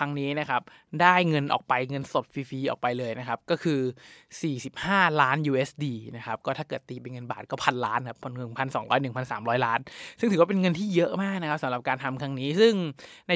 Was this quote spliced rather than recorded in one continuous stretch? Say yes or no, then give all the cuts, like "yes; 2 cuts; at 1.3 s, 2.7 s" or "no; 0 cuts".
no; 0 cuts